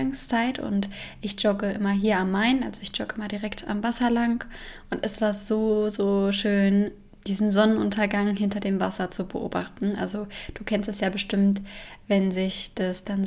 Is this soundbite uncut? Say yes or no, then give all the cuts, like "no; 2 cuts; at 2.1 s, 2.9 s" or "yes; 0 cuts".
yes; 0 cuts